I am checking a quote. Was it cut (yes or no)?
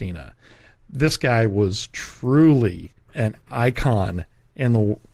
yes